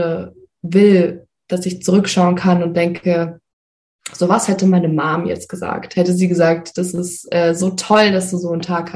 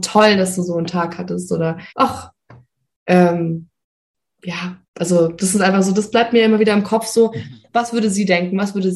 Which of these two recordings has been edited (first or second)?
second